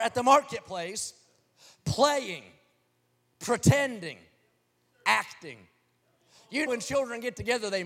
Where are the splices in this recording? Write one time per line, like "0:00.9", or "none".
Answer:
0:06.7